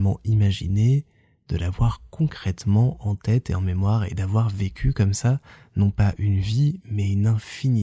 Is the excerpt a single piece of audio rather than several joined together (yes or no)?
yes